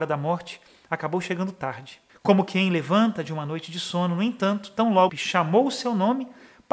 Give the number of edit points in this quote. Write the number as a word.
two